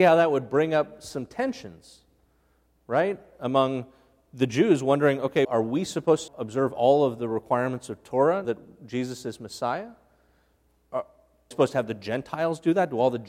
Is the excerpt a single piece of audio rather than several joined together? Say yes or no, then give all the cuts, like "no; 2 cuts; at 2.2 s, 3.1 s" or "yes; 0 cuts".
no; 4 cuts; at 5.4 s, 6.3 s, 8.4 s, 11.5 s